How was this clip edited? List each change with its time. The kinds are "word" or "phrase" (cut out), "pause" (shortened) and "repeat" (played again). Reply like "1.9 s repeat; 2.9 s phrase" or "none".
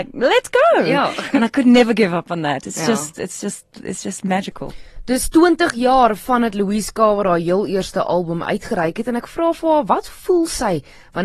none